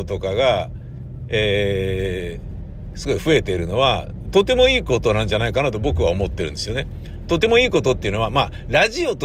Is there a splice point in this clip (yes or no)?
yes